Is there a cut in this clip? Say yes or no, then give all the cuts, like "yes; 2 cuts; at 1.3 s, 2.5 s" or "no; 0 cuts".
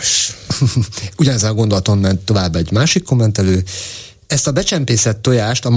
no; 0 cuts